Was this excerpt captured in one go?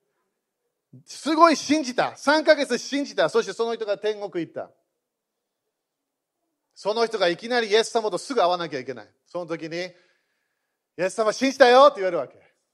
yes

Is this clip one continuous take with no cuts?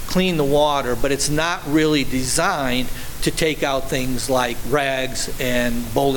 yes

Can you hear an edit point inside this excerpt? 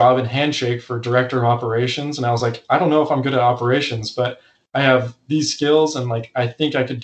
no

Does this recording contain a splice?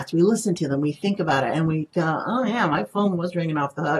no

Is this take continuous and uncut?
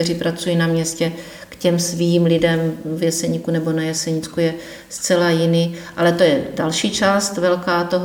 yes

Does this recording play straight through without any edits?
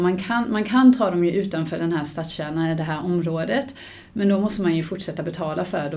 yes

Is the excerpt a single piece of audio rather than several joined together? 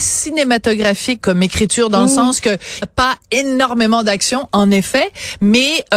no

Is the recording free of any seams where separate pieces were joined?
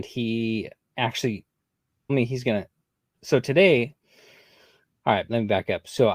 no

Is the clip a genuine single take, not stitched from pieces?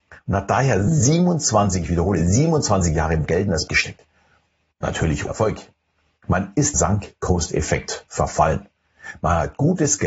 no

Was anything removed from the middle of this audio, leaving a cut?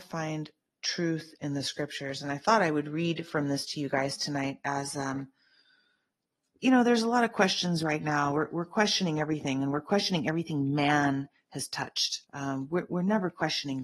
yes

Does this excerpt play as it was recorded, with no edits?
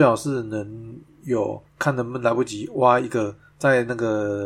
no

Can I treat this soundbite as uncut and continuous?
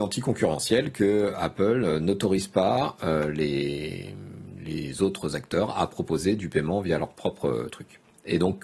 yes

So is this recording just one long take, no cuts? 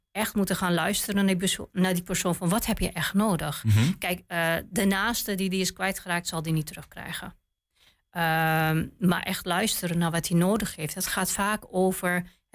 yes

